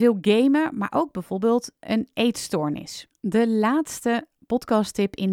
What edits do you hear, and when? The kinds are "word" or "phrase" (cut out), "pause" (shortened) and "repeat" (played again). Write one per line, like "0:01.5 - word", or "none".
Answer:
none